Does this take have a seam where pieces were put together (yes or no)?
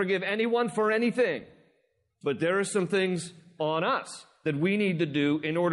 no